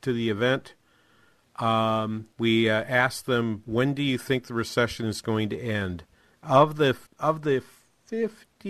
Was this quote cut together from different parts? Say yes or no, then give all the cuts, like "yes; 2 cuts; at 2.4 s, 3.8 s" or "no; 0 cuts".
yes; 2 cuts; at 2.3 s, 7.1 s